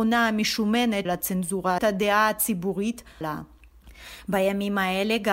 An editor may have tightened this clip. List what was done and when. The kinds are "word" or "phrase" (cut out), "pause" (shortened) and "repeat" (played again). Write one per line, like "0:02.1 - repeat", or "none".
0:01.1 - word
0:01.8 - phrase
0:03.2 - word